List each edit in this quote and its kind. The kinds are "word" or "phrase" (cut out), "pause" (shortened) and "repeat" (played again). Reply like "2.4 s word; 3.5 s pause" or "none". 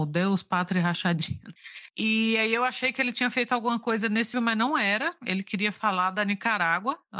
4.3 s word